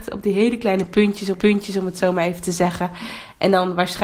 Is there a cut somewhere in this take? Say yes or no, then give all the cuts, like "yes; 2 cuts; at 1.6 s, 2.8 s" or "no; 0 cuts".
yes; 1 cut; at 1.3 s